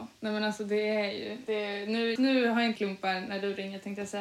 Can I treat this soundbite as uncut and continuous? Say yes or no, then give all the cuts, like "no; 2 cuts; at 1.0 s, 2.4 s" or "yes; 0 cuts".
no; 3 cuts; at 1.5 s, 2.2 s, 2.8 s